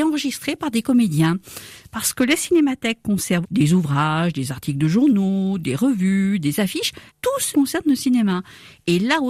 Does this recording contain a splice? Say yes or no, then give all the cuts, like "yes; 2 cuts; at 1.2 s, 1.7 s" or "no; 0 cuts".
yes; 3 cuts; at 3.4 s, 7.1 s, 7.5 s